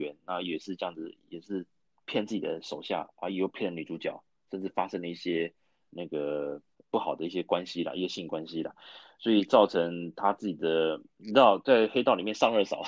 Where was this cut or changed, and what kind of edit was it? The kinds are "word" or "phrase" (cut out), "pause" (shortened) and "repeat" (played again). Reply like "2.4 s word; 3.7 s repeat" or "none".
6.7 s pause